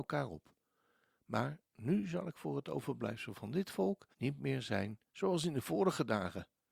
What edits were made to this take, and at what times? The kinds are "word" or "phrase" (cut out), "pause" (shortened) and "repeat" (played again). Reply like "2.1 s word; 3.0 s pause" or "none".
4.1 s pause; 5.1 s pause